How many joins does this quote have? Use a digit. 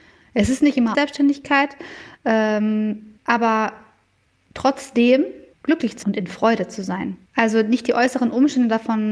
5